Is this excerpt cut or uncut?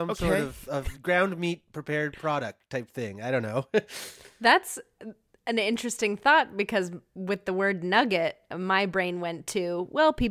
cut